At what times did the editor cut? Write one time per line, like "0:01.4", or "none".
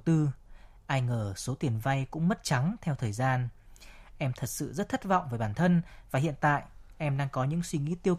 none